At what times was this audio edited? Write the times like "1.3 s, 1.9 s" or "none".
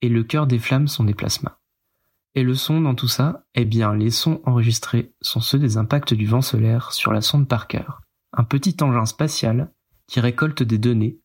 none

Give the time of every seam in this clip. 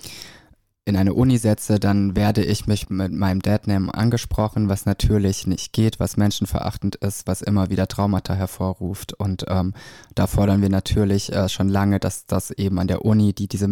2.8 s

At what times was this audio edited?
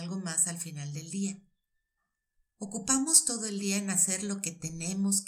none

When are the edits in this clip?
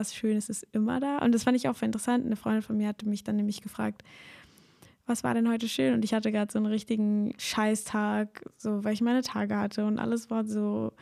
none

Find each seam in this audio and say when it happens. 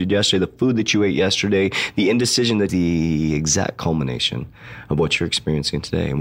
2.7 s

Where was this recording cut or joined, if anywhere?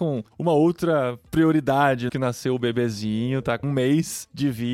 2.1 s, 3.6 s

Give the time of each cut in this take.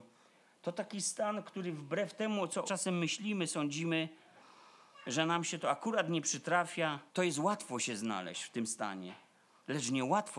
2.6 s, 7.1 s

